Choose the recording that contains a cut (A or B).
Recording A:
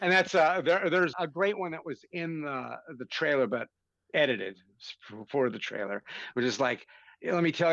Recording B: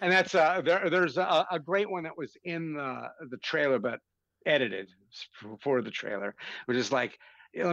A